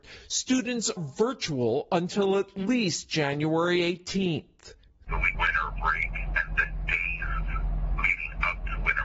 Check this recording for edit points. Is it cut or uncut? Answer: cut